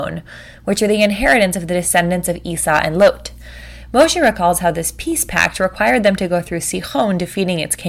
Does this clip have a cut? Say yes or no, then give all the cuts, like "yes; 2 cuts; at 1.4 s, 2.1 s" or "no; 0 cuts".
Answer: no; 0 cuts